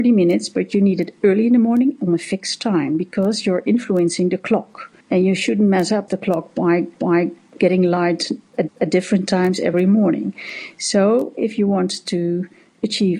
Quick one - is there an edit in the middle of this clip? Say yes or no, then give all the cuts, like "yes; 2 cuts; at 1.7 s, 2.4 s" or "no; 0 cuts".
yes; 4 cuts; at 5.0 s, 6.1 s, 7.0 s, 8.7 s